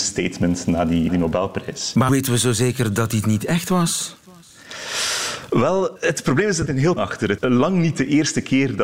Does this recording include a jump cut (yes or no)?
yes